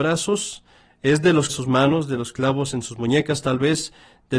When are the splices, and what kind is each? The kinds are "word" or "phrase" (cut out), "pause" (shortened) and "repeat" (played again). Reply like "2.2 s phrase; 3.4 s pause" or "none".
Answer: 1.5 s phrase